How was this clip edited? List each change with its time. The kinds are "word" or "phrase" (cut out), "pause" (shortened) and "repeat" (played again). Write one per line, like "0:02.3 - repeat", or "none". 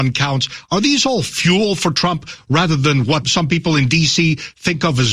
0:03.2 - word